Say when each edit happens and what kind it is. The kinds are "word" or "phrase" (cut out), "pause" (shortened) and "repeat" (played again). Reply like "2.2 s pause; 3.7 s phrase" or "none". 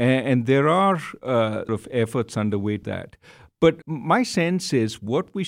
1.7 s word; 2.8 s word; 3.8 s word